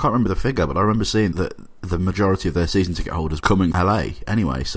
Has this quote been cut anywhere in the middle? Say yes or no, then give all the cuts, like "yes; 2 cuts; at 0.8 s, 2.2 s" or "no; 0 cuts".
yes; 3 cuts; at 1.3 s, 3.4 s, 3.7 s